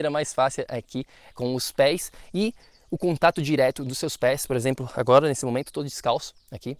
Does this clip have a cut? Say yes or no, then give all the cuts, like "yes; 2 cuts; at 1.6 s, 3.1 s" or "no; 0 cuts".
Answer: yes; 1 cut; at 1.3 s